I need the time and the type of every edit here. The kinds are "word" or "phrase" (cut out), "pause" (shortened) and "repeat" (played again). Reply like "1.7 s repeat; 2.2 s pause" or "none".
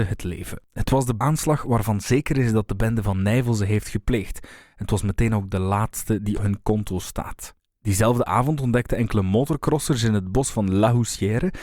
1.2 s word; 6.3 s word